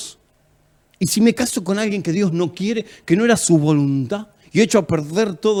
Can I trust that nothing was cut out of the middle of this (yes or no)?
yes